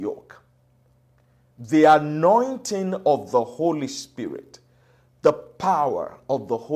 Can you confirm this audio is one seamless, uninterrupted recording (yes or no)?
yes